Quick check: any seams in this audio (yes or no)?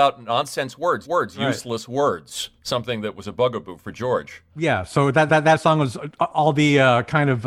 yes